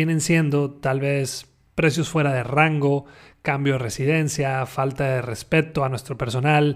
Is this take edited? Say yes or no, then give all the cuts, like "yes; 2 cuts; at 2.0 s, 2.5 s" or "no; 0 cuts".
no; 0 cuts